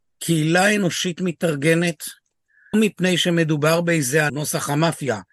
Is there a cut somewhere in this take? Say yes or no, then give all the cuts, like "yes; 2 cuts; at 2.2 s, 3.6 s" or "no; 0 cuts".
yes; 2 cuts; at 2.7 s, 4.3 s